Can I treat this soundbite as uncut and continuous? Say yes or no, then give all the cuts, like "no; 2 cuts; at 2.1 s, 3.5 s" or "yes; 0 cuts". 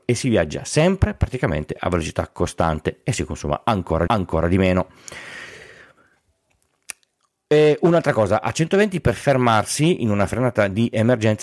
no; 1 cut; at 4.1 s